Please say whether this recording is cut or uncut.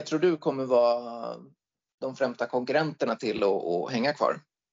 uncut